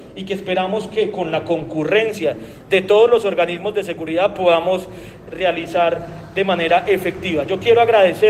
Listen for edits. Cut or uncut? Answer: uncut